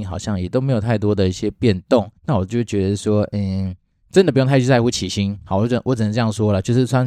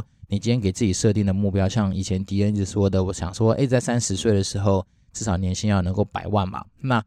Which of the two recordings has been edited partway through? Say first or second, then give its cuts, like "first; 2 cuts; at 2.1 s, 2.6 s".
first; 2 cuts; at 2.2 s, 3.9 s